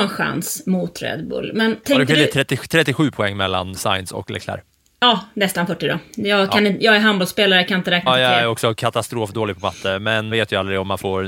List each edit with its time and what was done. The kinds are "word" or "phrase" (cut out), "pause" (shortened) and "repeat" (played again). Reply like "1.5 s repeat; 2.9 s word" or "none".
1.8 s word; 8.1 s word; 10.3 s word